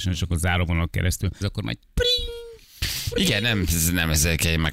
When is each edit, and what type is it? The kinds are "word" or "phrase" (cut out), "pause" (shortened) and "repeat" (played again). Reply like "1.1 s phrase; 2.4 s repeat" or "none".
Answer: 1.4 s word